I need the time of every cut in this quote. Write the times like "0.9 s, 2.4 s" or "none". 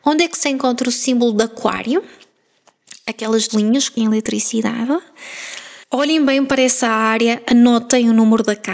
3.5 s, 4.0 s, 5.8 s